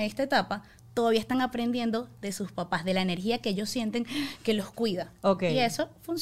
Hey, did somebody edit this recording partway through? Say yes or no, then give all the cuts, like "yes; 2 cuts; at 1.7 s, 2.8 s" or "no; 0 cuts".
no; 0 cuts